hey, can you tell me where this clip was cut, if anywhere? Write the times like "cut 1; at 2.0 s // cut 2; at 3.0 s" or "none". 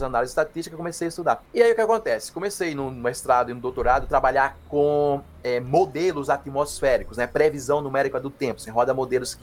none